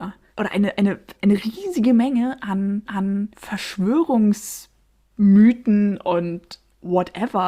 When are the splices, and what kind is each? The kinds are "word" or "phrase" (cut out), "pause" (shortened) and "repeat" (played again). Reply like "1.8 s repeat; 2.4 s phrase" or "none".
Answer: 1.2 s word; 2.9 s repeat